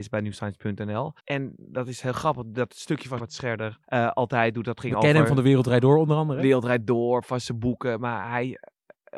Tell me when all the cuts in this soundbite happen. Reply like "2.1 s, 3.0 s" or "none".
1.2 s, 3.8 s